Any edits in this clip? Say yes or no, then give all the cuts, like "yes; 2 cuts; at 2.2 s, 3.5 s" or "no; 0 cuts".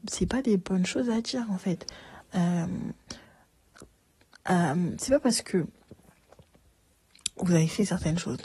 no; 0 cuts